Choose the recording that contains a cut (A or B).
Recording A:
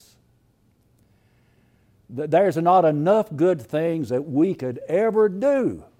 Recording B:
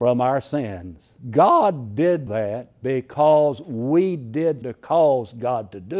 B